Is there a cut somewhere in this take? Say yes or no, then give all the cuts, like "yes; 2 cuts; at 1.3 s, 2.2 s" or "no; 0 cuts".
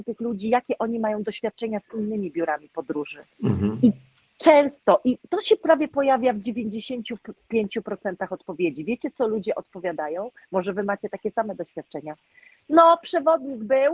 no; 0 cuts